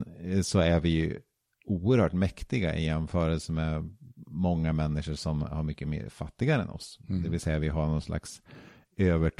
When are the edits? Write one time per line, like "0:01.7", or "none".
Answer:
none